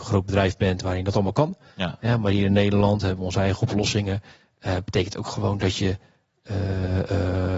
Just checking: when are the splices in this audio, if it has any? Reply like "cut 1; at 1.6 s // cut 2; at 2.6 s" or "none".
none

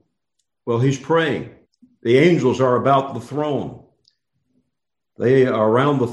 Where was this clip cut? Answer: cut 1; at 1.6 s

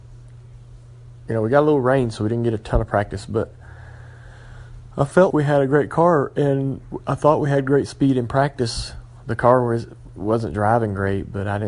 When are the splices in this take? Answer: cut 1; at 5.3 s

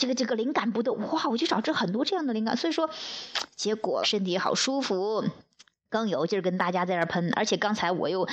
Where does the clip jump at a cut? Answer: cut 1; at 4.0 s

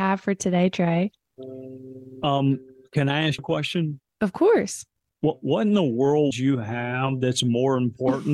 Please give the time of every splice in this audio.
cut 1; at 3.4 s // cut 2; at 6.3 s

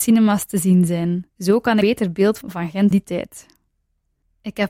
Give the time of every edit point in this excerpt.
cut 1; at 1.3 s // cut 2; at 1.8 s // cut 3; at 2.4 s // cut 4; at 2.9 s

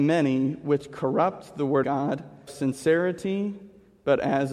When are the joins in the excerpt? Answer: cut 1; at 1.8 s // cut 2; at 2.5 s

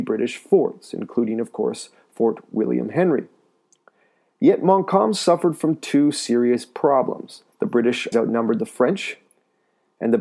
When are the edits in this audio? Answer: cut 1; at 7.5 s // cut 2; at 8.1 s

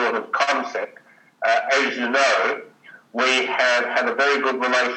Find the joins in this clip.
none

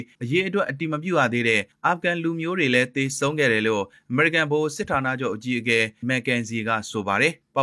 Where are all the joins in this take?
cut 1; at 6.0 s

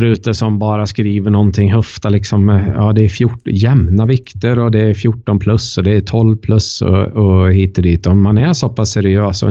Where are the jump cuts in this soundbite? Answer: none

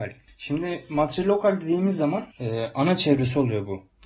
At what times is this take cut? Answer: cut 1; at 2.3 s

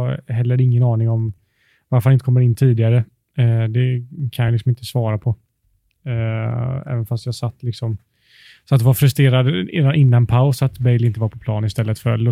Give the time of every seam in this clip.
none

